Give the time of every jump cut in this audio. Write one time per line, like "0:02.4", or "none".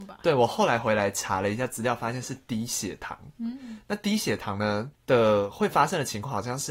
0:05.0